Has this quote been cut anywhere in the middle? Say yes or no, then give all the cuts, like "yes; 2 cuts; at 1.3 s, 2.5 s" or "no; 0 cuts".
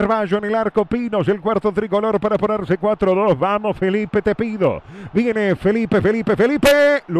no; 0 cuts